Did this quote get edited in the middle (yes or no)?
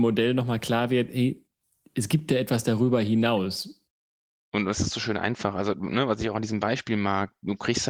no